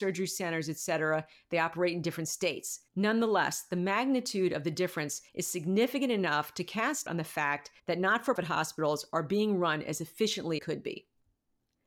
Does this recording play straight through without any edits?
no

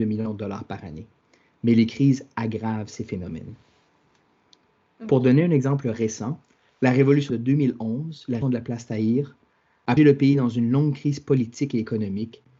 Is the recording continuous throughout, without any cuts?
no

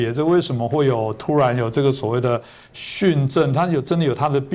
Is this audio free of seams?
yes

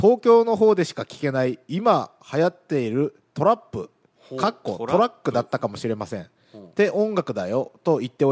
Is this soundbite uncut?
no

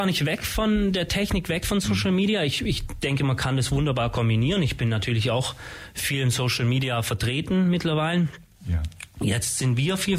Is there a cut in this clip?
no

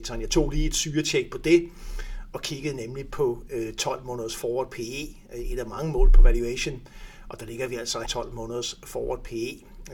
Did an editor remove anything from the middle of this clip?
yes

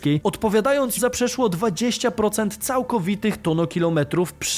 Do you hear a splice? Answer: yes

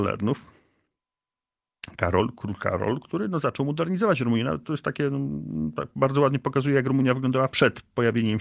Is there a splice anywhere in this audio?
no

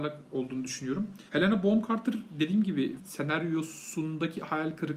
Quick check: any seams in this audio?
yes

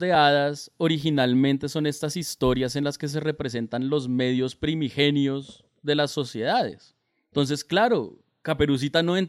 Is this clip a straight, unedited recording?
yes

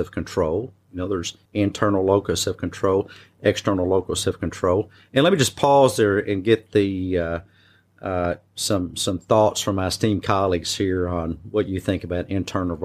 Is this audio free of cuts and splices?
no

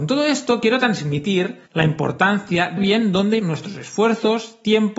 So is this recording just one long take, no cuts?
no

